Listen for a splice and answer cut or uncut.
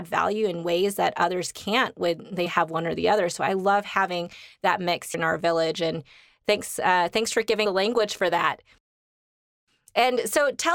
cut